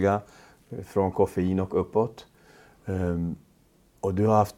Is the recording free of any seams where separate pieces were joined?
yes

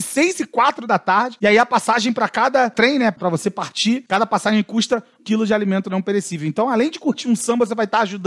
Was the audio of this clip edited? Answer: yes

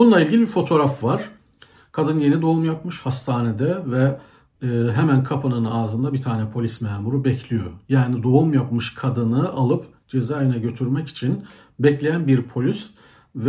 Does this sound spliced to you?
no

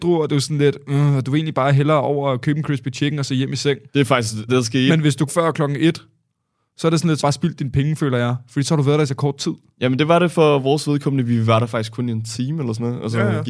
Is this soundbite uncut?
no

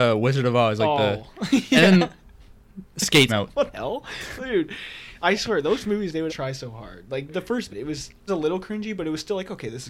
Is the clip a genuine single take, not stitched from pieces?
no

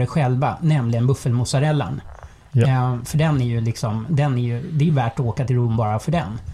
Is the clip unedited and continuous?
yes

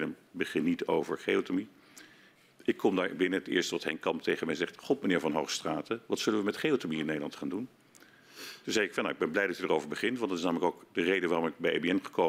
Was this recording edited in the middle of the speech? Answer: no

